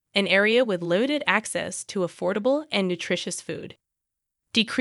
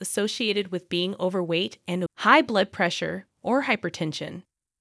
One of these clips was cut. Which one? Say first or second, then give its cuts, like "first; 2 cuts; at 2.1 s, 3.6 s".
second; 1 cut; at 2.1 s